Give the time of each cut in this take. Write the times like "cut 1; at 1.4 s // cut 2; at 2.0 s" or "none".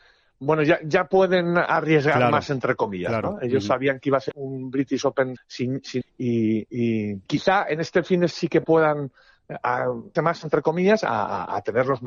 cut 1; at 4.3 s // cut 2; at 5.4 s // cut 3; at 6.0 s // cut 4; at 7.3 s // cut 5; at 8.3 s // cut 6; at 10.2 s